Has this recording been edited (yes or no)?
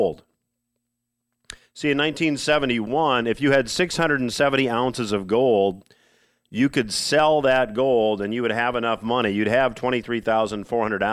no